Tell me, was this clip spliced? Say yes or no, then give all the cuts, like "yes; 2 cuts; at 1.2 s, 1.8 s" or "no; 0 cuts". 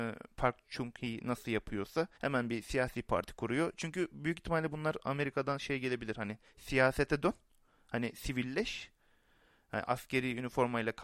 yes; 1 cut; at 2.1 s